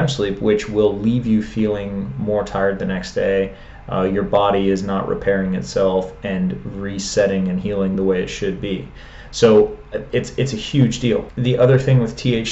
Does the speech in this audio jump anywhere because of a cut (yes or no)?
no